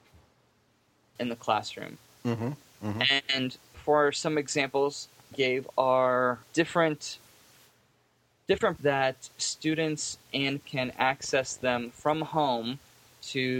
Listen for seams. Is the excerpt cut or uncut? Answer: cut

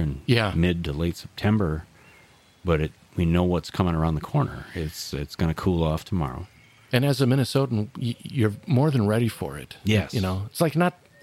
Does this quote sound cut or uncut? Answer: uncut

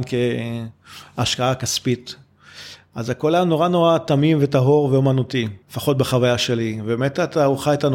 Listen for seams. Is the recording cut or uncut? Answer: cut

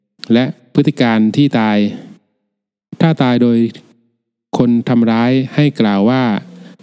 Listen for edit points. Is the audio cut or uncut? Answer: uncut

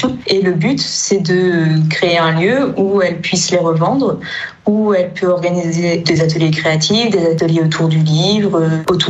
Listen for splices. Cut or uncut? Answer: uncut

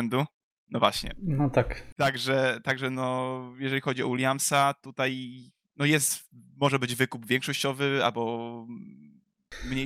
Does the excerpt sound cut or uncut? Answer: uncut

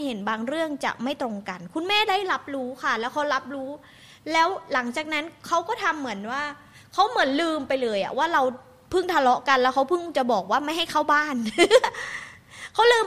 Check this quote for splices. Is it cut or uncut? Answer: uncut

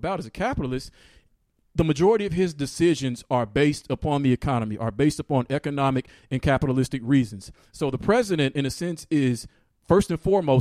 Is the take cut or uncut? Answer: uncut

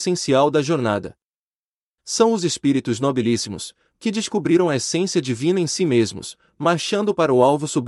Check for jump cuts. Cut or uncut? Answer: uncut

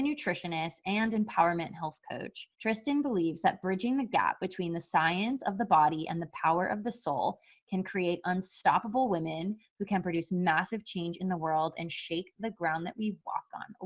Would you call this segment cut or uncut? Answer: cut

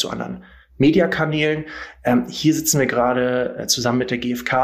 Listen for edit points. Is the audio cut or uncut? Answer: uncut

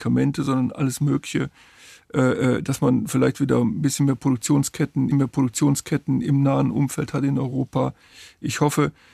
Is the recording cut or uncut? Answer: cut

